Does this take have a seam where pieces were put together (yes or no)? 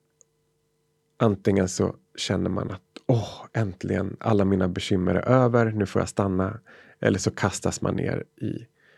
no